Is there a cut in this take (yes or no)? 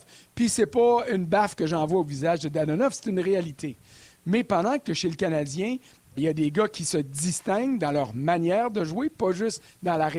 yes